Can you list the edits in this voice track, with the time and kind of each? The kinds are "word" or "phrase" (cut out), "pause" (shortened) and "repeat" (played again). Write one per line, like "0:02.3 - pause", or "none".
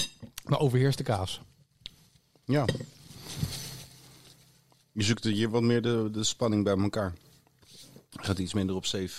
none